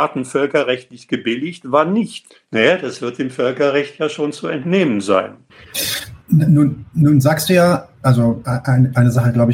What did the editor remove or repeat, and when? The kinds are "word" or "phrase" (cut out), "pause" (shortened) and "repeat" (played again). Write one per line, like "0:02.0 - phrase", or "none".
0:06.2 - pause